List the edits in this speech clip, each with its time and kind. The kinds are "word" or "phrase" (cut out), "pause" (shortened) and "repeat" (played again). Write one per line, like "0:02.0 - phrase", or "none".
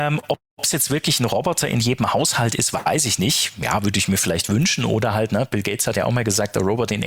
none